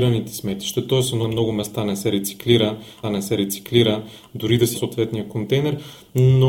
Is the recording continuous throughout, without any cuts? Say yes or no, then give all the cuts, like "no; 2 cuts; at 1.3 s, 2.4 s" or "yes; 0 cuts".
no; 3 cuts; at 1.2 s, 3.0 s, 4.7 s